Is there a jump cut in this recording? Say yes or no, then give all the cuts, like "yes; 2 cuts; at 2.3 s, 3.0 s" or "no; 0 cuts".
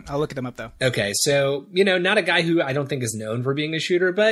no; 0 cuts